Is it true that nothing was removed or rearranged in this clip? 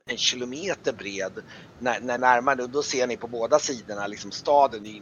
no; 1 cut; at 2.2 s

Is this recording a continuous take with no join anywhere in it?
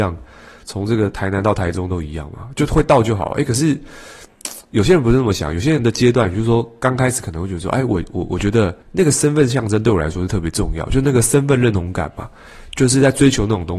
no; 1 cut; at 8.8 s

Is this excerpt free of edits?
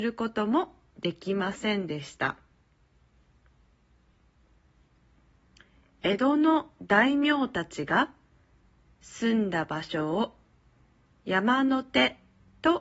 yes; 0 cuts

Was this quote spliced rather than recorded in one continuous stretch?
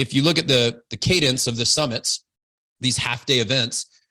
no; 0 cuts

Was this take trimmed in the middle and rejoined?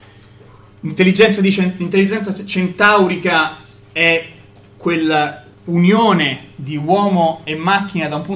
yes; 1 cut; at 5.5 s

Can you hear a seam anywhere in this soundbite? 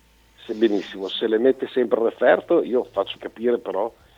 yes; 1 cut; at 3.2 s

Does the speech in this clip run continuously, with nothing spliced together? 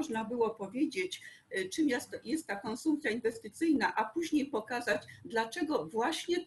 yes; 0 cuts

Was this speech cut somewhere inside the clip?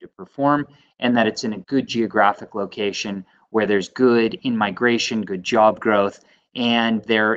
no; 0 cuts

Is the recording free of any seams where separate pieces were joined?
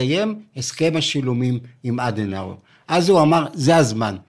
yes; 0 cuts

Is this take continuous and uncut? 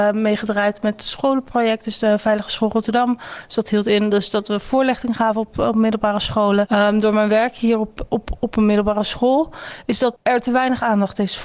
yes; 0 cuts

